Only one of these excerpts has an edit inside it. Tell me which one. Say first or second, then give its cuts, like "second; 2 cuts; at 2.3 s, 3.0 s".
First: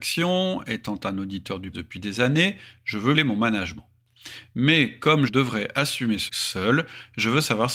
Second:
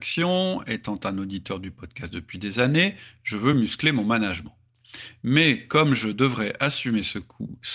first; 4 cuts; at 1.7 s, 3.1 s, 5.3 s, 6.3 s